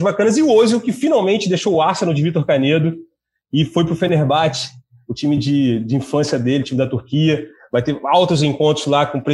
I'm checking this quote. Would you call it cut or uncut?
uncut